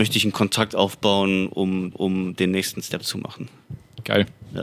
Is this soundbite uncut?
no; 1 cut; at 1.9 s

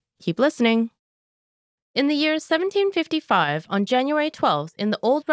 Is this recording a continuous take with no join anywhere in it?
yes; 0 cuts

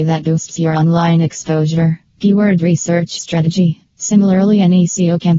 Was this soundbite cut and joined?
yes; 3 cuts; at 2.1 s, 3.2 s, 3.9 s

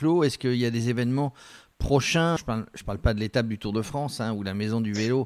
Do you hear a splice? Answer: yes; 1 cut; at 2.4 s

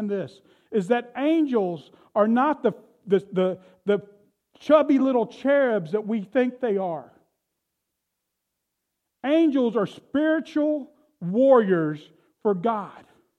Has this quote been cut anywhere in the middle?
no; 0 cuts

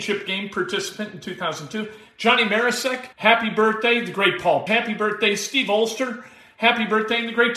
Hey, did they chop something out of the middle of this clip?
yes; 2 cuts; at 3.1 s, 4.7 s

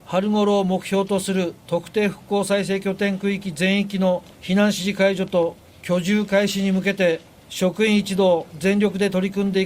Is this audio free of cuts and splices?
no; 4 cuts; at 4.3 s, 5.6 s, 7.3 s, 8.5 s

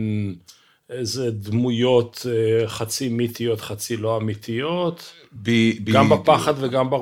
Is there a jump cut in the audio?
no; 0 cuts

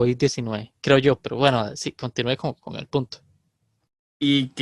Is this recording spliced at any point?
no; 0 cuts

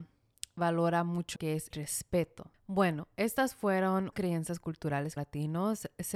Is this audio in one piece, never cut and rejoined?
no; 4 cuts; at 1.4 s, 1.7 s, 4.1 s, 5.2 s

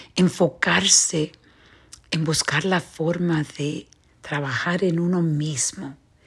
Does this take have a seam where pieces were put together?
no; 0 cuts

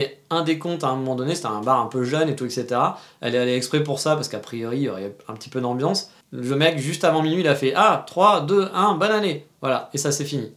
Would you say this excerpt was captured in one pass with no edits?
no; 1 cut; at 6.2 s

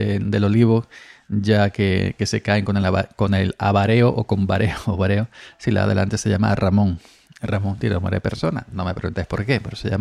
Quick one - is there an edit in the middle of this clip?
no; 0 cuts

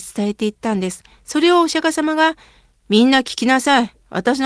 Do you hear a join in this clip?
no; 0 cuts

